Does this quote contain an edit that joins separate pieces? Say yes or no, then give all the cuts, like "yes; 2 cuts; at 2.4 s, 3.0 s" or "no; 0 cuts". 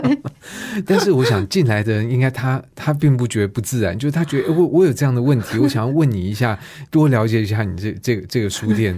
yes; 1 cut; at 6.9 s